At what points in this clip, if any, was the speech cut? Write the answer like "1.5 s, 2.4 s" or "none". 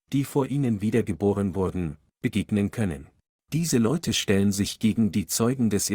3.3 s

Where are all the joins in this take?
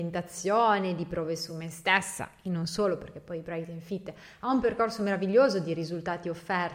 none

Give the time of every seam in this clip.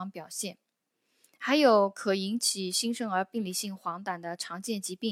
none

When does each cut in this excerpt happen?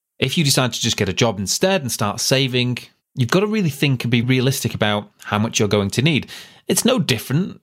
4.2 s

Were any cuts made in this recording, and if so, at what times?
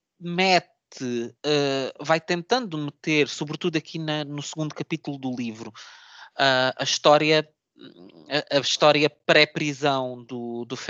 1.4 s

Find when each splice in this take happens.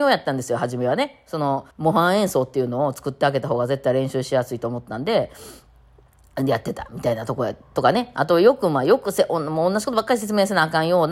1.7 s

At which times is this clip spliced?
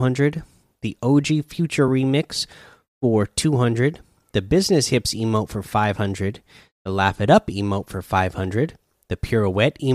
none

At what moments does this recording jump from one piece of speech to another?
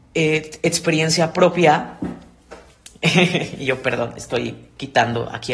none

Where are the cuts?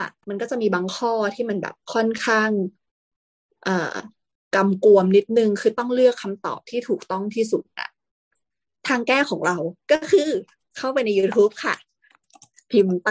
none

